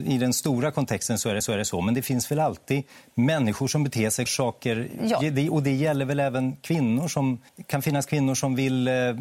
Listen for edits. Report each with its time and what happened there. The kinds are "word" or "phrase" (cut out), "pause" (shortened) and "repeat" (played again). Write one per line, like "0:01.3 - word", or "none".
0:01.4 - repeat
0:02.9 - pause
0:04.3 - phrase
0:07.5 - pause